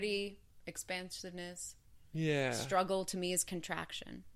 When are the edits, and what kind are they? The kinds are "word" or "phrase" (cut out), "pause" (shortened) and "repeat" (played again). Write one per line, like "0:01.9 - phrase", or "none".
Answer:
none